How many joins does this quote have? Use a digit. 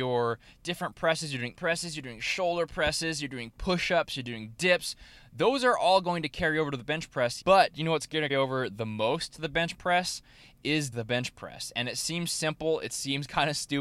4